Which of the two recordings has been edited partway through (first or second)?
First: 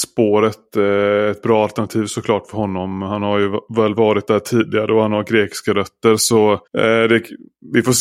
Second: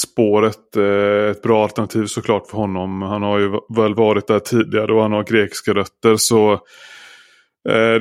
first